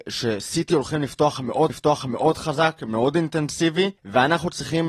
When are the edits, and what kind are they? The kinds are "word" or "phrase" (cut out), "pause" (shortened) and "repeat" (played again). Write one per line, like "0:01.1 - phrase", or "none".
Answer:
0:01.7 - repeat
0:04.0 - pause